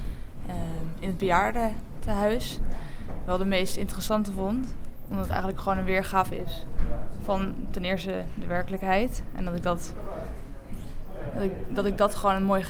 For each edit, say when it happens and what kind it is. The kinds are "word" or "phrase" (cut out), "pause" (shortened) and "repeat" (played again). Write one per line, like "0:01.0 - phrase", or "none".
none